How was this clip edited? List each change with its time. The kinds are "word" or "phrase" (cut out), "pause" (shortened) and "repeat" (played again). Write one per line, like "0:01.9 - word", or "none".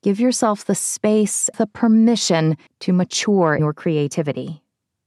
0:01.5 - word
0:02.7 - pause
0:03.6 - word